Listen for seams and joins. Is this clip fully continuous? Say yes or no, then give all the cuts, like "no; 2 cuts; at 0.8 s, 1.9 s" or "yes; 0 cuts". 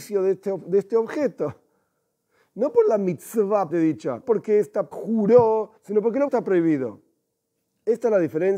no; 5 cuts; at 3.7 s, 4.2 s, 4.9 s, 5.8 s, 6.3 s